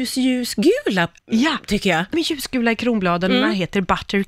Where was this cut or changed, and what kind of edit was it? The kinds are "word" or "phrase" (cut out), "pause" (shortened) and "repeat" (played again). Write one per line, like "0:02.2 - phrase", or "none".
0:01.2 - pause
0:02.1 - word